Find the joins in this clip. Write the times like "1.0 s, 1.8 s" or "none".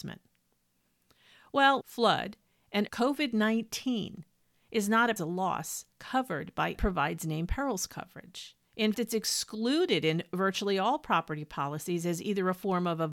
1.8 s, 2.9 s, 5.2 s, 5.9 s, 6.7 s, 8.9 s